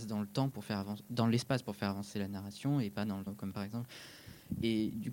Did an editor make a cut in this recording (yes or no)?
yes